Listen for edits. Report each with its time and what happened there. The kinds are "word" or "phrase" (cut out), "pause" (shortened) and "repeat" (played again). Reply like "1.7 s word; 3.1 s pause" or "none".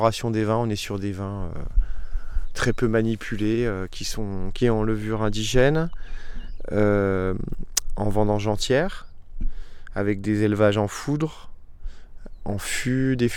4.6 s phrase